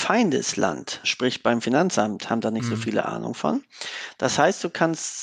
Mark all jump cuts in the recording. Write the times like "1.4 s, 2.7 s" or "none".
1.0 s

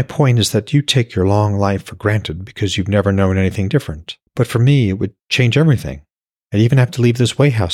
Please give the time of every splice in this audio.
4.3 s, 5.2 s

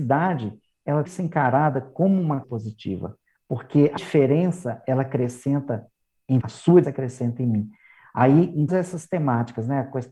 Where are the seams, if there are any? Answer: 1.0 s, 2.4 s, 4.0 s, 6.4 s, 6.8 s, 8.7 s

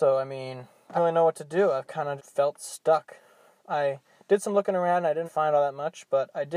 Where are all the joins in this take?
1.0 s, 2.2 s, 5.2 s

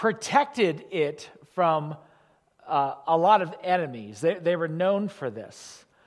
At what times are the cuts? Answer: none

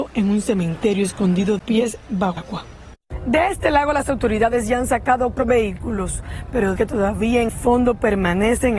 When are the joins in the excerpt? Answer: 1.6 s, 2.4 s, 5.4 s, 6.8 s, 7.5 s

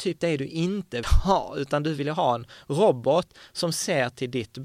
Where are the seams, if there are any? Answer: 1.0 s

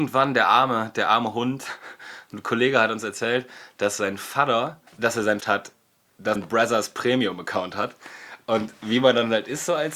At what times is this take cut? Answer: 4.9 s, 5.4 s, 6.3 s

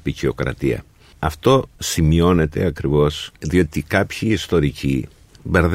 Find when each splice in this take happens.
1.8 s, 3.4 s

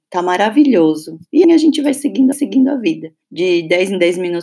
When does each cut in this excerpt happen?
1.4 s, 2.3 s, 3.2 s

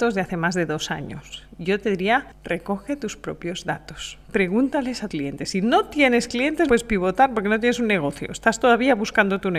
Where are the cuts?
4.2 s, 5.1 s, 6.7 s

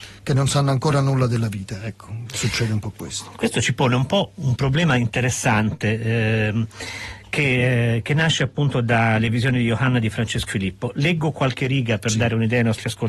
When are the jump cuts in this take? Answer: 10.5 s

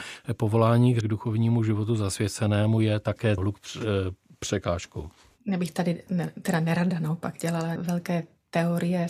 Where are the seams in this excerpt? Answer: 1.0 s, 3.4 s, 6.1 s, 7.8 s

